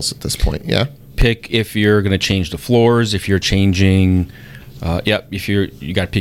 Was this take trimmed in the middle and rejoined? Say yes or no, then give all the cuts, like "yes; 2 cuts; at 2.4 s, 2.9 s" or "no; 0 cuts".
no; 0 cuts